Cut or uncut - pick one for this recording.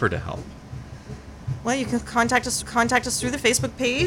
cut